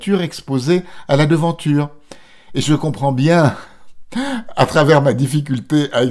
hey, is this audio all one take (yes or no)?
yes